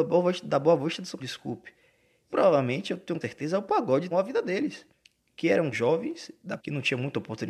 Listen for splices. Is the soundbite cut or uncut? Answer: cut